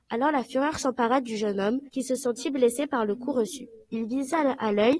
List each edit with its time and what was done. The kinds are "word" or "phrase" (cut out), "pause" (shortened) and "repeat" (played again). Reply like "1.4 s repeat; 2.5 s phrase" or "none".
1.9 s pause